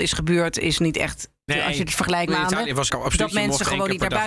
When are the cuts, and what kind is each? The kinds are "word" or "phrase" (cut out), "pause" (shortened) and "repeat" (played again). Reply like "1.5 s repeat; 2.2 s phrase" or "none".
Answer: 1.5 s word; 2.3 s phrase; 2.9 s word